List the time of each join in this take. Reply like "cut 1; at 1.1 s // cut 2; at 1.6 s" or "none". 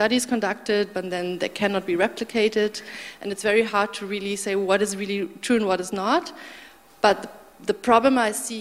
none